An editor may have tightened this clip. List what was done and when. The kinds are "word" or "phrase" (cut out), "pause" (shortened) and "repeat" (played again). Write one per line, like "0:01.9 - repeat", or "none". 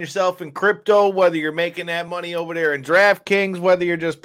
none